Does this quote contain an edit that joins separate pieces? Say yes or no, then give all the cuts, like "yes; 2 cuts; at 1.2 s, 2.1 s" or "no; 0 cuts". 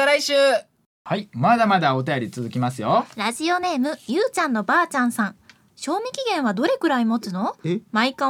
no; 0 cuts